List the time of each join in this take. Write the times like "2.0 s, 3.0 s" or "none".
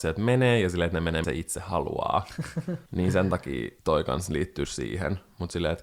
1.2 s, 2.9 s, 3.8 s, 4.6 s